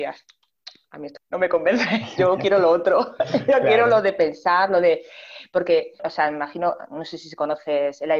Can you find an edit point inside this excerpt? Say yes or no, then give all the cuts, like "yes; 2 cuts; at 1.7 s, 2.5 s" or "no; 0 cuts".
yes; 2 cuts; at 1.2 s, 6.0 s